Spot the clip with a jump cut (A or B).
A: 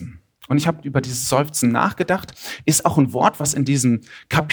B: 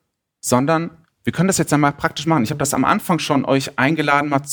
B